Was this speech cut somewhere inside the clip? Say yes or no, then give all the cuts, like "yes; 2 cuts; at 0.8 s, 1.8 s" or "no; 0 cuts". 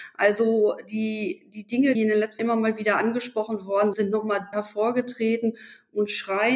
yes; 4 cuts; at 1.9 s, 2.4 s, 3.9 s, 4.5 s